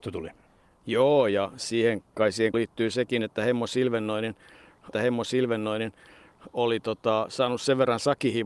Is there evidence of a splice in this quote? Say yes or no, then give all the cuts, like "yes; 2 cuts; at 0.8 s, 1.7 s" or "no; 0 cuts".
yes; 2 cuts; at 2.5 s, 4.9 s